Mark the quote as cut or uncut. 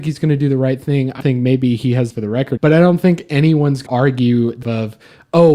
cut